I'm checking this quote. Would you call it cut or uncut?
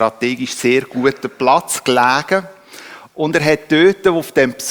uncut